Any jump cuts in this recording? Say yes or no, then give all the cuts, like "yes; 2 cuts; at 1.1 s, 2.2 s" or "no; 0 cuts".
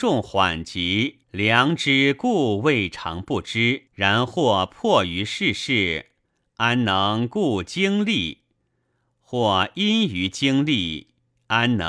yes; 2 cuts; at 1.2 s, 3.9 s